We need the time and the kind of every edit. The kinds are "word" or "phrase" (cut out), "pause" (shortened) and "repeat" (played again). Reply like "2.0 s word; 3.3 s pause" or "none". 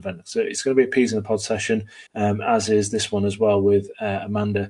2.1 s pause